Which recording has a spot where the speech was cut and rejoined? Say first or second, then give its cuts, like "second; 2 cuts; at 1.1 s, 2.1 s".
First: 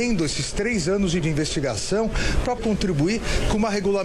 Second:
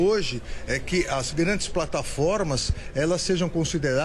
first; 2 cuts; at 1.2 s, 2.6 s